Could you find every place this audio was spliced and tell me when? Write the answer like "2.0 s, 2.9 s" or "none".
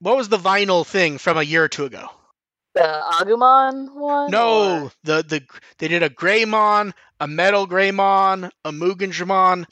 none